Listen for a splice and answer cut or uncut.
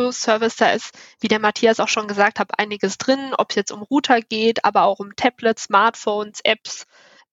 uncut